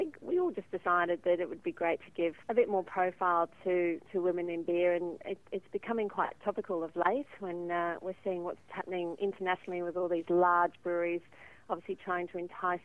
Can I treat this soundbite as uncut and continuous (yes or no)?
no